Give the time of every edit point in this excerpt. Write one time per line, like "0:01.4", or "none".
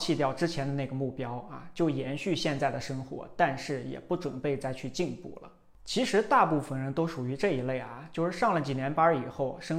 none